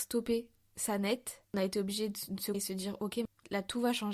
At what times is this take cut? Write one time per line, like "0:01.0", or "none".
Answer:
0:01.4
0:02.5